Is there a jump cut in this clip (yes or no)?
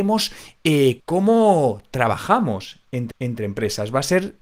yes